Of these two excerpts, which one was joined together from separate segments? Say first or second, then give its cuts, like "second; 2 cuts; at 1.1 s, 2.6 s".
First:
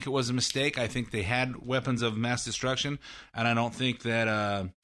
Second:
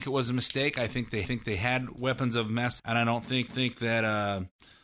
second; 3 cuts; at 1.2 s, 2.8 s, 3.5 s